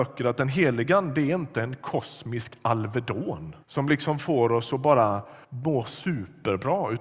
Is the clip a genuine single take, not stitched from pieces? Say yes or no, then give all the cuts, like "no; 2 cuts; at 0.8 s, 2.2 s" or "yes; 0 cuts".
no; 2 cuts; at 3.6 s, 5.4 s